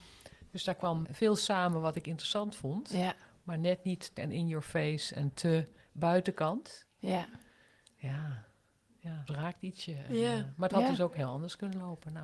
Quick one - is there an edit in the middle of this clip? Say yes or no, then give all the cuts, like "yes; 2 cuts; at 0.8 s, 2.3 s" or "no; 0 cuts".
yes; 3 cuts; at 1.0 s, 4.2 s, 9.3 s